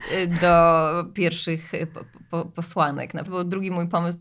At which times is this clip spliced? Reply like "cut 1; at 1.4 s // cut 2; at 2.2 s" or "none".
cut 1; at 3.3 s